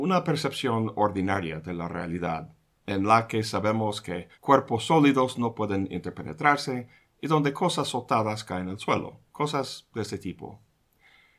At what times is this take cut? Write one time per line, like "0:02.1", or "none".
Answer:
0:04.3